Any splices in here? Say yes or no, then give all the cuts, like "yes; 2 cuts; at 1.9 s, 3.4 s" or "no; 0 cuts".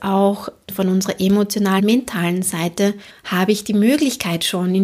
yes; 2 cuts; at 1.8 s, 3.1 s